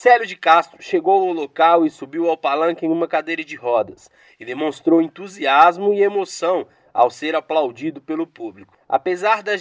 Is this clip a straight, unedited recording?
yes; 0 cuts

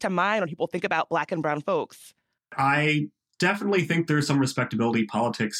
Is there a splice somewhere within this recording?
yes; 1 cut; at 2.4 s

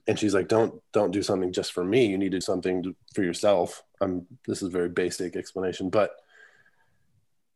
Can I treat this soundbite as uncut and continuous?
no; 3 cuts; at 2.4 s, 3.0 s, 3.9 s

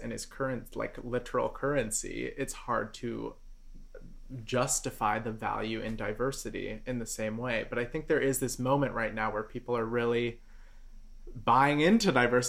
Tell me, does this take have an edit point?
no; 0 cuts

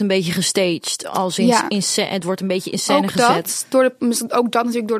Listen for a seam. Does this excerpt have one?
no; 0 cuts

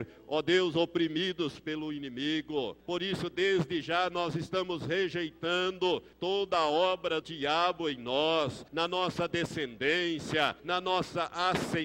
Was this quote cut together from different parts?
yes; 5 cuts; at 2.8 s, 6.1 s, 7.2 s, 8.7 s, 10.6 s

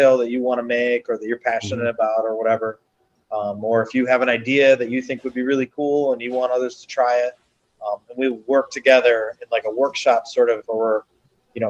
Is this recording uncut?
no; 1 cut; at 10.7 s

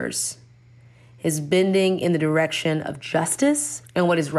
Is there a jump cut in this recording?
no; 0 cuts

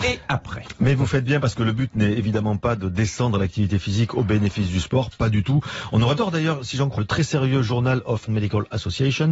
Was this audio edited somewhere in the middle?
yes; 3 cuts; at 6.2 s, 7.0 s, 8.3 s

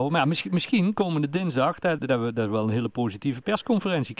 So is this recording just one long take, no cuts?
no; 1 cut; at 2.0 s

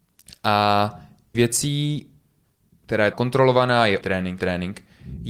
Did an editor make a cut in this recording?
yes; 4 cuts; at 1.3 s, 3.1 s, 4.0 s, 4.4 s

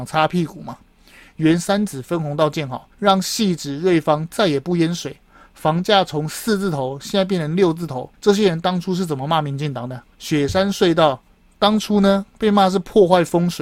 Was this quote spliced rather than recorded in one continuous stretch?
yes; 3 cuts; at 2.9 s, 8.1 s, 10.1 s

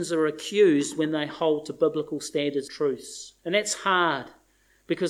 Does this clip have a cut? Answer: yes; 2 cuts; at 2.7 s, 3.4 s

